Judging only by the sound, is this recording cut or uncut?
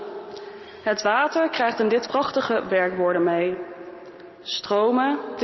cut